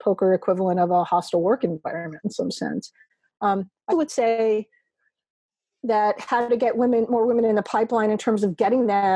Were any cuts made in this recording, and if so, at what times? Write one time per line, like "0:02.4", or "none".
0:03.9

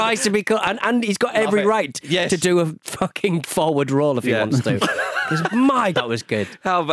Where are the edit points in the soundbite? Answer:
0:03.4
0:05.9

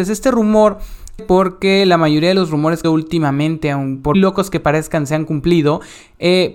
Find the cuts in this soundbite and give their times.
0:01.2
0:02.8
0:04.1

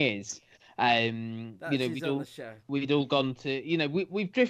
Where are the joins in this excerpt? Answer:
0:02.6

